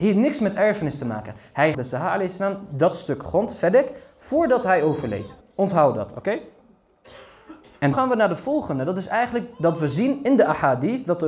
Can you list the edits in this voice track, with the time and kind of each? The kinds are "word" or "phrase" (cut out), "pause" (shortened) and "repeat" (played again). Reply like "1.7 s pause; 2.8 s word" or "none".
1.7 s phrase; 5.4 s pause; 7.9 s word